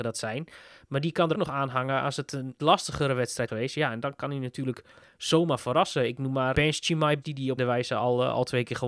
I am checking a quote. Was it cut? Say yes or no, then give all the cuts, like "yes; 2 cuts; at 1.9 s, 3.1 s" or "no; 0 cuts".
yes; 6 cuts; at 1.3 s, 2.6 s, 3.5 s, 6.5 s, 7.2 s, 7.6 s